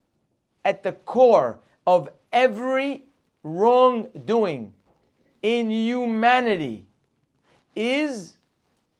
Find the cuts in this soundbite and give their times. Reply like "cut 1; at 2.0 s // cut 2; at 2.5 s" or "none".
none